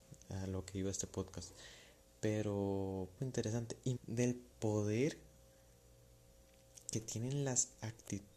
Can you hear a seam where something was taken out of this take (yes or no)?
yes